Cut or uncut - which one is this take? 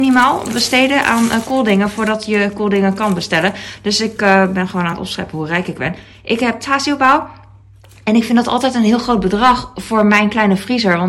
uncut